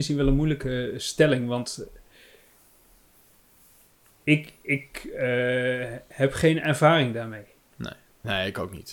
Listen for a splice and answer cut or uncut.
uncut